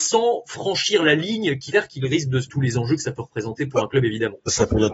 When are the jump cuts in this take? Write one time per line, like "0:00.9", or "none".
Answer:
0:01.7
0:02.5